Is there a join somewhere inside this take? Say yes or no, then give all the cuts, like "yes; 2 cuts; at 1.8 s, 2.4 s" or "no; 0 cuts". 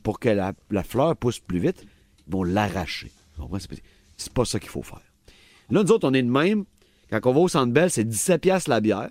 no; 0 cuts